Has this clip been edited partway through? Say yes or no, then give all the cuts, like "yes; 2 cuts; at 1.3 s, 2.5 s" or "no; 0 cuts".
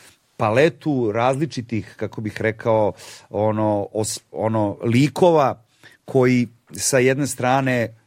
no; 0 cuts